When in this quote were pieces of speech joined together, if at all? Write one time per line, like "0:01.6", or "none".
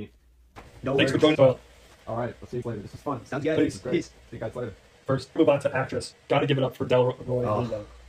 0:01.4
0:02.6
0:05.4
0:06.1
0:07.2